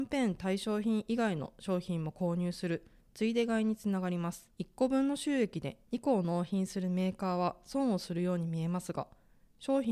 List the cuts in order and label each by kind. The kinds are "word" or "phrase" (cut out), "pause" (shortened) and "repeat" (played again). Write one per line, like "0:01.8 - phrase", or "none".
0:04.5 - pause